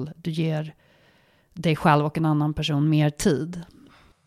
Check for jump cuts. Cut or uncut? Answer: uncut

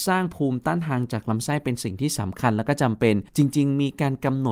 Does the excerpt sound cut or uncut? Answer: cut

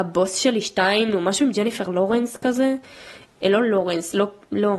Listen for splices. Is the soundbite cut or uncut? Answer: uncut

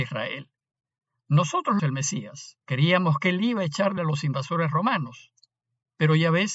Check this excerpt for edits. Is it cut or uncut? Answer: cut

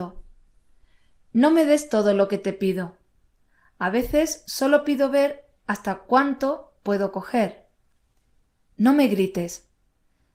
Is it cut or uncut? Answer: uncut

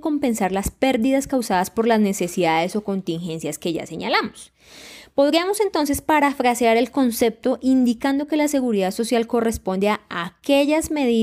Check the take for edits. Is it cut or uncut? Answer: uncut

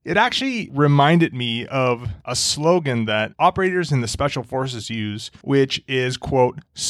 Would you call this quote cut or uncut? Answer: uncut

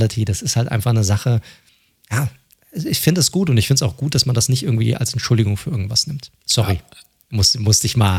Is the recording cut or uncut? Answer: cut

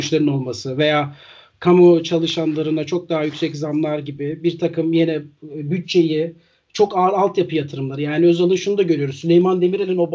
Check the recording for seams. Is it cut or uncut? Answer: uncut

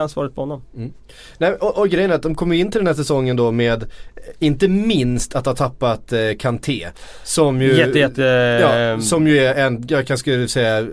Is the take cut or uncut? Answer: uncut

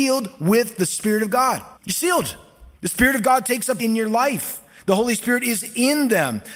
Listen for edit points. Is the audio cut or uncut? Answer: cut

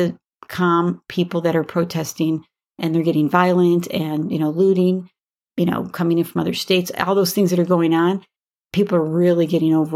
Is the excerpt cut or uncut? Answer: uncut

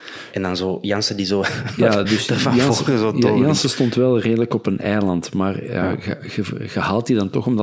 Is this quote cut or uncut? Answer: uncut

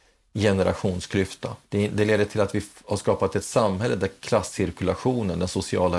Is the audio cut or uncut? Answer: cut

